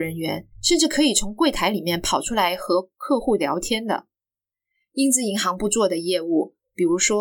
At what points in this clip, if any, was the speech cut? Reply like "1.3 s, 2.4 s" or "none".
none